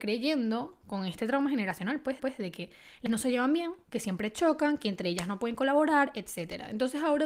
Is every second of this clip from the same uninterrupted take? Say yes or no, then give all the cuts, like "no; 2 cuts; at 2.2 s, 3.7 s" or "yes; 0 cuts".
no; 2 cuts; at 2.2 s, 3.1 s